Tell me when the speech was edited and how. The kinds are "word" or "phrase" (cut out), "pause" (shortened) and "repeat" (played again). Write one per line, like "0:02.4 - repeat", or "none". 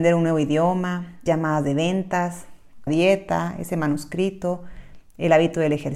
0:01.3 - word
0:02.9 - word